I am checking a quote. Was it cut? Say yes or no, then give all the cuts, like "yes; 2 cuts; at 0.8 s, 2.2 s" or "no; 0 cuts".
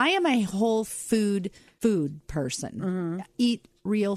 no; 0 cuts